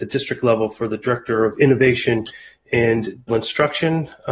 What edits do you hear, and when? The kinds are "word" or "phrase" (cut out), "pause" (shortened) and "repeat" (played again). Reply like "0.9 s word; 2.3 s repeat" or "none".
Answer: 3.3 s word